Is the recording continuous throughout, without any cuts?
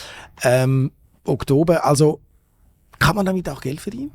yes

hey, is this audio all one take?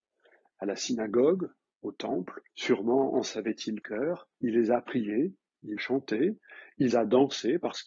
no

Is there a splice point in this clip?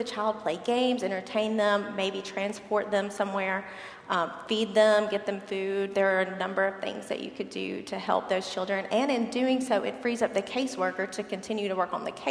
no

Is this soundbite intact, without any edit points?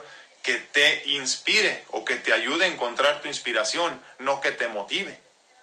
yes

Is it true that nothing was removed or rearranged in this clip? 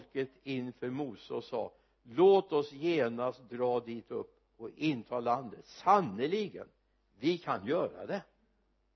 yes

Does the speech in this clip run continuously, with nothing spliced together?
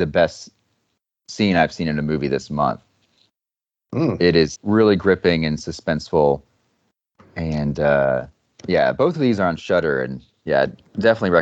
no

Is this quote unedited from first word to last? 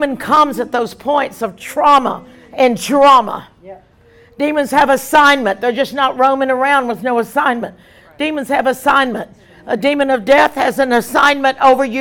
yes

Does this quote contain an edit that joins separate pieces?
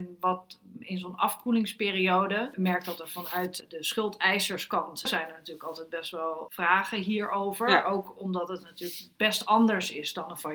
no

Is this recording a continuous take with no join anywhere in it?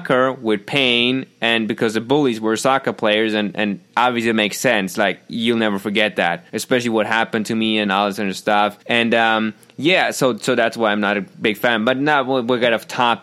no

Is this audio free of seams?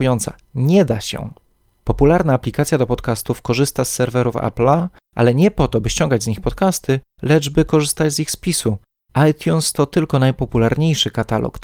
yes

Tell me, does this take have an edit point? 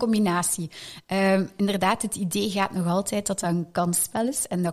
no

